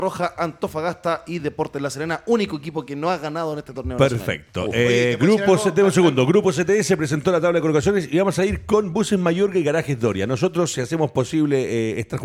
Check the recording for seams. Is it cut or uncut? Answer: uncut